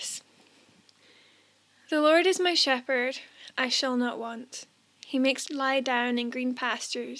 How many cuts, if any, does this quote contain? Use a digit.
1